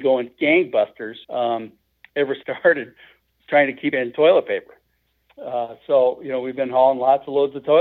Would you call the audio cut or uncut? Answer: cut